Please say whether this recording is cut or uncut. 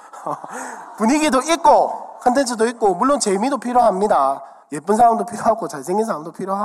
cut